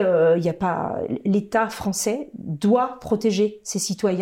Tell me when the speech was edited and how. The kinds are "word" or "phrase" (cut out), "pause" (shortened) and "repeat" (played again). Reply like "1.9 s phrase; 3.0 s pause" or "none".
none